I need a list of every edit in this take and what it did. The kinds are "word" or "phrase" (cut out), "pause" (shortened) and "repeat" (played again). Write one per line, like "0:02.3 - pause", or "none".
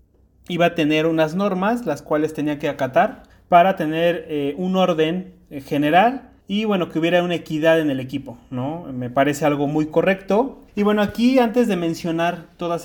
0:03.3 - pause
0:06.4 - pause
0:10.7 - pause